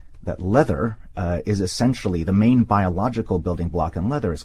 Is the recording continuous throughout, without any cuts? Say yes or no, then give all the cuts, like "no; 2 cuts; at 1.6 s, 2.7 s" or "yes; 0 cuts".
yes; 0 cuts